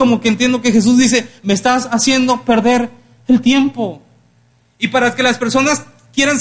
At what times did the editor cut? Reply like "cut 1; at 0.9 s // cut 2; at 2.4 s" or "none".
none

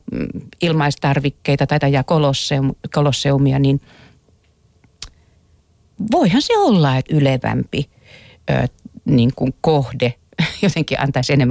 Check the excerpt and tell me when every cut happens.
cut 1; at 1.8 s // cut 2; at 7.1 s

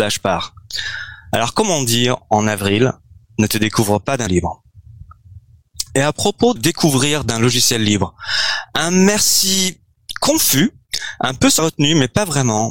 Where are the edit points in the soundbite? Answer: cut 1; at 4.3 s // cut 2; at 6.6 s // cut 3; at 11.6 s

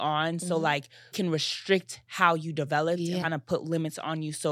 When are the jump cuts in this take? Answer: cut 1; at 1.1 s // cut 2; at 3.2 s

